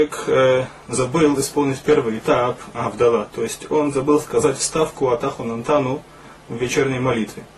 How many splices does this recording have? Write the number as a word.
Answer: zero